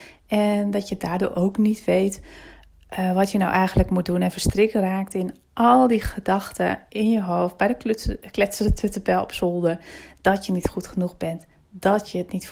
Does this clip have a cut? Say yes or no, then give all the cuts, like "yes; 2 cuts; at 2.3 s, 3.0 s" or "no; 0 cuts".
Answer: no; 0 cuts